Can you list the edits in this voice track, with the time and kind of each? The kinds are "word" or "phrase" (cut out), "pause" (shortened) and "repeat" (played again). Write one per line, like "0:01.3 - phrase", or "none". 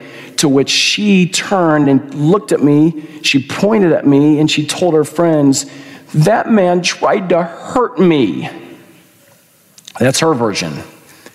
none